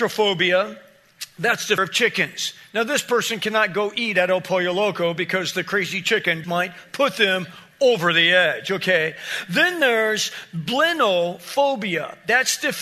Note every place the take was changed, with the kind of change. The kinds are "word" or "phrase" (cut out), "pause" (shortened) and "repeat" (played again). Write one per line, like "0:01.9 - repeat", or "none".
0:01.8 - word
0:06.4 - word